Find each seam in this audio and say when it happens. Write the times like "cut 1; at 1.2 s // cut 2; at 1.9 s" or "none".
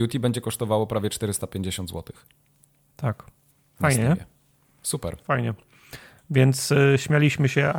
none